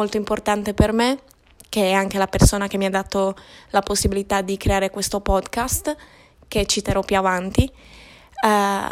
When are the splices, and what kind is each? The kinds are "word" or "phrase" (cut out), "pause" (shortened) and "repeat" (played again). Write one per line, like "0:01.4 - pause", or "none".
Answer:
none